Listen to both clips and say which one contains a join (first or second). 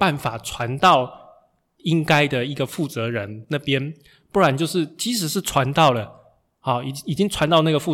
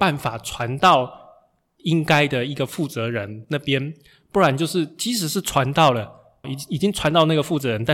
second